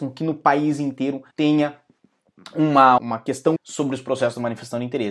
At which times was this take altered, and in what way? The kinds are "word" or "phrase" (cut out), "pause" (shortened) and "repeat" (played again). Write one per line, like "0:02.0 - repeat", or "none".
0:01.3 - pause
0:03.0 - word
0:03.6 - word